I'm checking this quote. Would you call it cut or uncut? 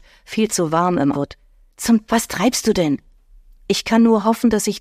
cut